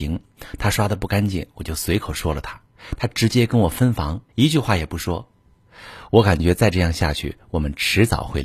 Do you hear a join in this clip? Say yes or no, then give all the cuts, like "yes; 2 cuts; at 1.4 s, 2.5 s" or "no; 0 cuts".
yes; 1 cut; at 4.3 s